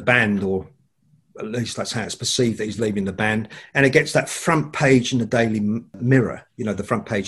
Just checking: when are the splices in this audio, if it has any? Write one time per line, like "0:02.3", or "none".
none